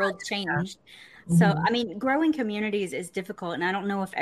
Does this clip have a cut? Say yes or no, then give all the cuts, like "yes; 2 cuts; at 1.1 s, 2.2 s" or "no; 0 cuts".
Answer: no; 0 cuts